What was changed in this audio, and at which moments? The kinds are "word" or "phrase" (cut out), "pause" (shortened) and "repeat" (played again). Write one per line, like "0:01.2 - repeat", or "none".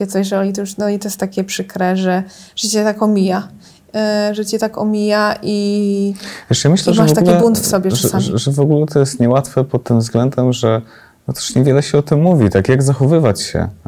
none

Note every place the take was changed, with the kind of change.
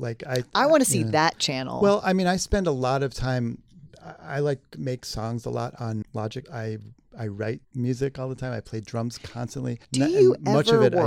0:06.0 - word
0:07.6 - pause
0:09.8 - pause

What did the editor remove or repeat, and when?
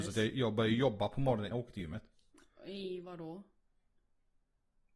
0:01.5 - word

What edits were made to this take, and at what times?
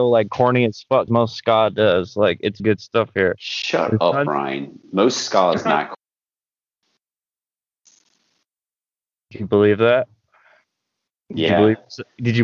0:01.1 - word
0:02.6 - word

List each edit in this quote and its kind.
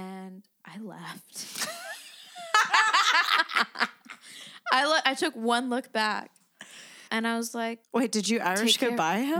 0:07.1 - pause
0:07.8 - pause

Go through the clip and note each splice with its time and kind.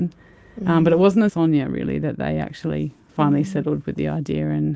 0:01.3 - phrase

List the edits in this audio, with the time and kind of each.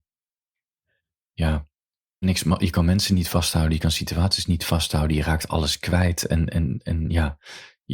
0:02.2 - phrase

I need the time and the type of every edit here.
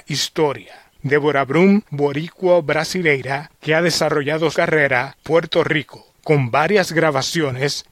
0:01.9 - phrase
0:04.5 - word
0:05.2 - word

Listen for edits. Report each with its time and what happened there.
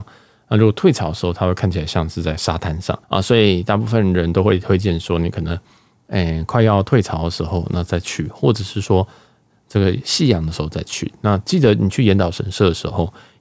0:03.0 - pause

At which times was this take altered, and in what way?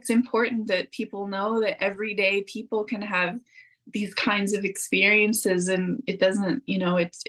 none

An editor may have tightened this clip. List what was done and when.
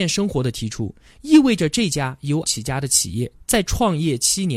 0:02.4 - word

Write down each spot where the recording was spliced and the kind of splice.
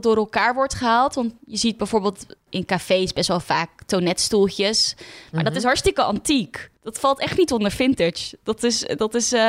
0:02.5 - word
0:06.7 - pause

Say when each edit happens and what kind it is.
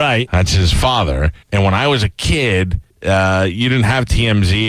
0:01.4 - pause
0:02.9 - pause

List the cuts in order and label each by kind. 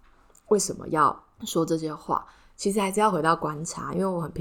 0:01.3 - pause

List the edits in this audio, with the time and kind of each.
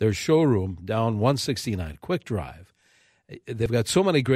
none

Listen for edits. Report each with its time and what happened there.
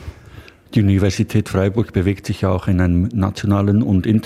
none

